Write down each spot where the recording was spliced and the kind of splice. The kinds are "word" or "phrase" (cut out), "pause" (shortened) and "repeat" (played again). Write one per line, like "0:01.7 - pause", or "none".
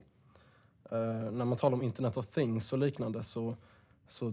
none